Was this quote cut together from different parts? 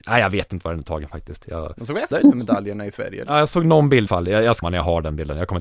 yes; 3 cuts; at 2.1 s, 4.1 s, 4.6 s

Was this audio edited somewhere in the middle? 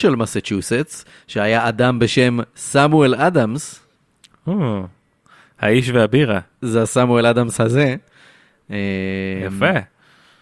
no; 0 cuts

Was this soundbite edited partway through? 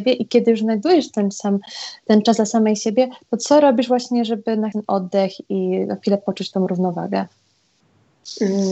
yes; 1 cut; at 4.7 s

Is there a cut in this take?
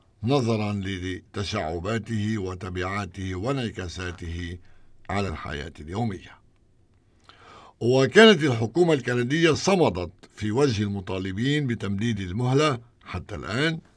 no; 0 cuts

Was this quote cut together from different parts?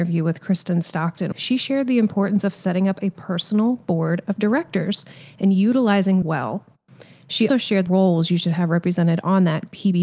yes; 4 cuts; at 1.3 s, 6.2 s, 7.5 s, 7.9 s

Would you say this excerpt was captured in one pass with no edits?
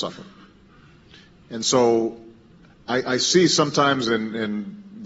no; 1 cut; at 2.7 s

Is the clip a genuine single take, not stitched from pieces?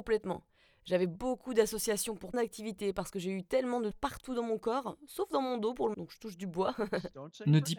no; 3 cuts; at 2.3 s, 3.9 s, 5.9 s

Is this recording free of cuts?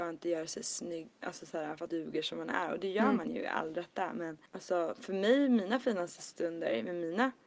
no; 3 cuts; at 1.1 s, 1.9 s, 4.5 s

